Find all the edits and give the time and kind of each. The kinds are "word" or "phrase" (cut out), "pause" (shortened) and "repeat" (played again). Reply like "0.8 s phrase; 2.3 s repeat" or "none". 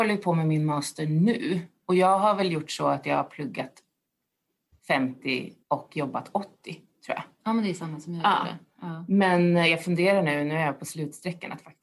5.6 s pause